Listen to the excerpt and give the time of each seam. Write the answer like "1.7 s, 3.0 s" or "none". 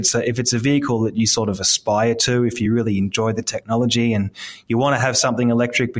none